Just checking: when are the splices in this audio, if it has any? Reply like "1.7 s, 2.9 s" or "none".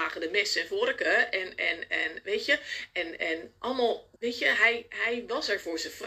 4.2 s